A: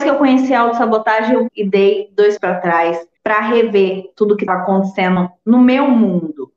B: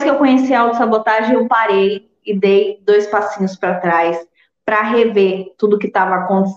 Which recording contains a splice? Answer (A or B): A